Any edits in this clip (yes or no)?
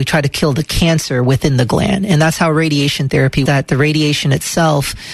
yes